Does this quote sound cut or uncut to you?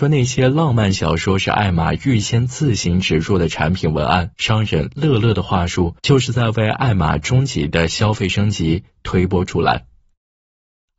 cut